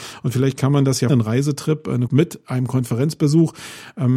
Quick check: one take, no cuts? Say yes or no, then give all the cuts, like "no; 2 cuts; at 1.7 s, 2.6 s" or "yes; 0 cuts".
no; 2 cuts; at 1.1 s, 2.1 s